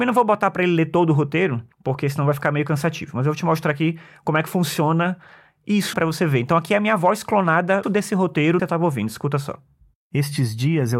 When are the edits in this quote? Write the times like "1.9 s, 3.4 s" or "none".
1.7 s, 5.9 s, 7.8 s, 8.6 s

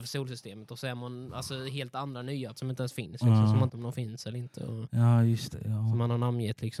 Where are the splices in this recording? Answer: 2.5 s, 3.7 s

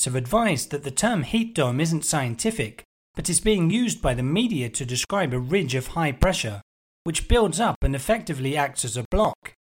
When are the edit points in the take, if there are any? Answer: none

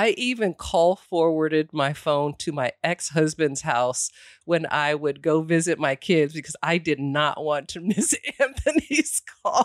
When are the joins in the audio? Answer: none

